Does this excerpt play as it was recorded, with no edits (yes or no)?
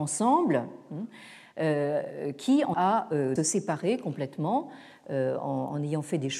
no